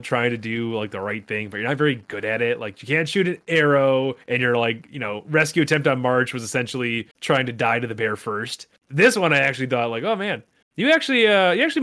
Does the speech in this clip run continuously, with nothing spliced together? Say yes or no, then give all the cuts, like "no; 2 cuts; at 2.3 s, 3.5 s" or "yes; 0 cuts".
no; 4 cuts; at 4.2 s, 7.1 s, 8.8 s, 10.6 s